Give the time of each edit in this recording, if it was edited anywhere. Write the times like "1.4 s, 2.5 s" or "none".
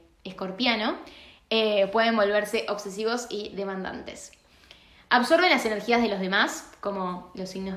none

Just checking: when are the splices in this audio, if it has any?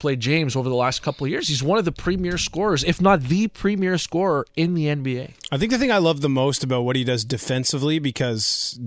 none

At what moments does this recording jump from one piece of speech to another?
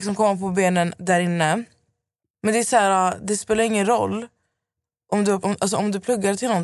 5.4 s

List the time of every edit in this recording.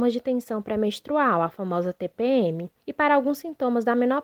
2.8 s

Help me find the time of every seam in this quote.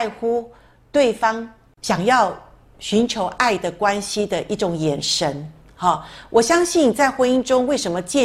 none

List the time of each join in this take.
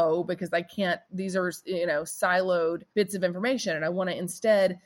1.0 s, 2.9 s

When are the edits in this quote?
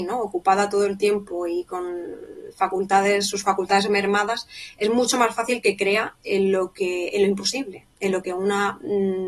none

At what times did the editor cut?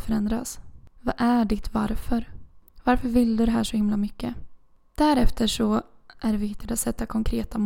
none

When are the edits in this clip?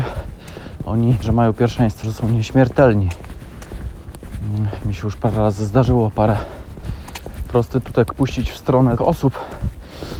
1.2 s, 2.0 s, 9.0 s

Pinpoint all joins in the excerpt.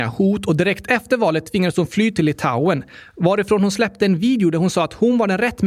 none

